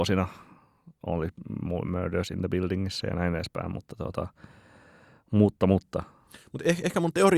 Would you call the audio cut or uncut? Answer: uncut